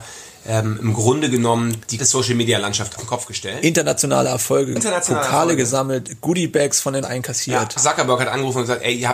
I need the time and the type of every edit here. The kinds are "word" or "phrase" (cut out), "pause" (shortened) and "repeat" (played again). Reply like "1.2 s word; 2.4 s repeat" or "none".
2.0 s word; 3.0 s word; 4.8 s word; 7.0 s word; 7.8 s word